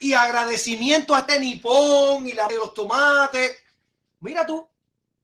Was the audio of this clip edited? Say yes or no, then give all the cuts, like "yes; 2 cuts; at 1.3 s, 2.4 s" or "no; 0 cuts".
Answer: yes; 2 cuts; at 1.3 s, 2.5 s